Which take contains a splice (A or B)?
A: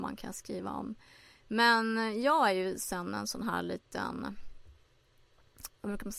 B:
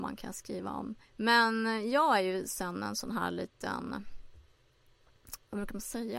B